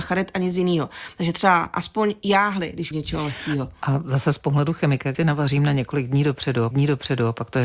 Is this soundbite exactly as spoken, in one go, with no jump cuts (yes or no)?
no